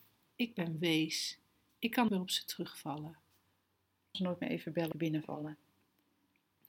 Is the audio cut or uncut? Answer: cut